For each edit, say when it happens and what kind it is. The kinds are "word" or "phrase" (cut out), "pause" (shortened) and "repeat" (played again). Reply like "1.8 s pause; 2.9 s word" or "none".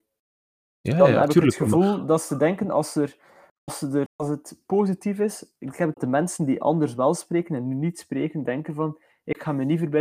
4.1 s word; 5.9 s phrase

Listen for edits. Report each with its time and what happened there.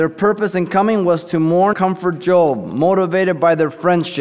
1.7 s word

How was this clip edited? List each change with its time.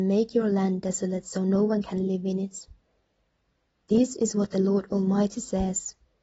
none

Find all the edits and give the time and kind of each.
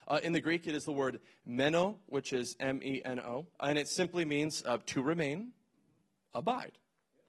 3.5 s pause

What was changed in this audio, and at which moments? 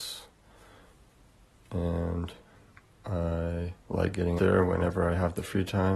3.8 s pause; 4.4 s word

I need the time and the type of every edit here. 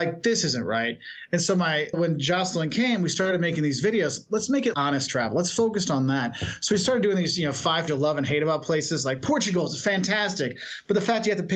1.9 s word; 4.7 s word; 7.9 s word

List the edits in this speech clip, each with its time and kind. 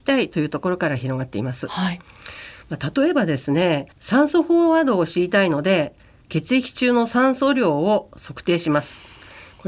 3.9 s pause

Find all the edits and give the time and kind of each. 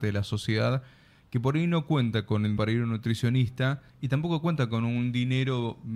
2.6 s word; 3.9 s pause

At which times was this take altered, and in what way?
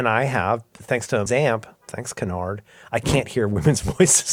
1.3 s phrase; 1.8 s pause

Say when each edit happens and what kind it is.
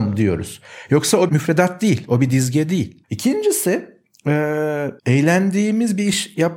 1.3 s word; 3.0 s pause; 5.0 s pause

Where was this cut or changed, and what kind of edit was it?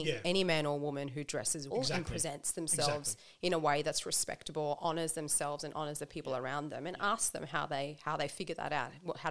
1.7 s word

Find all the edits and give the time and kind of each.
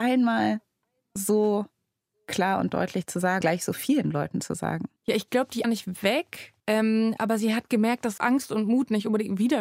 3.4 s word; 5.0 s pause; 5.6 s phrase; 6.6 s pause; 8.2 s word

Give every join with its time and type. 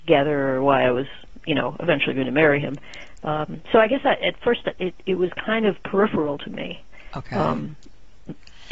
none

